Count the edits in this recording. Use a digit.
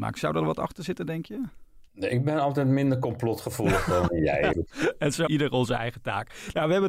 4